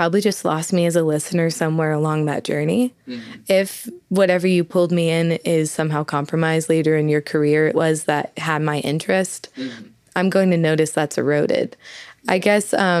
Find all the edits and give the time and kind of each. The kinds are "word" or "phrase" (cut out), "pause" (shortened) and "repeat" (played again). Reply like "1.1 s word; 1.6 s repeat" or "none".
7.7 s phrase